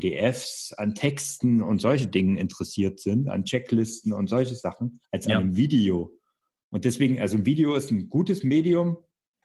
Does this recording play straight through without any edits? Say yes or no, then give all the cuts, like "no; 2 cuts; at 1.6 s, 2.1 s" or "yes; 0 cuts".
no; 1 cut; at 5.0 s